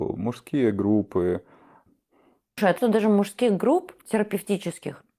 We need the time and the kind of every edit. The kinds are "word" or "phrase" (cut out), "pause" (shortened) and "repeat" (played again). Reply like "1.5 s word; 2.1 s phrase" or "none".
2.8 s word

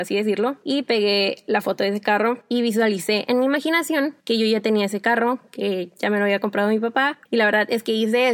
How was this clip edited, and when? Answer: 4.2 s pause; 7.3 s pause

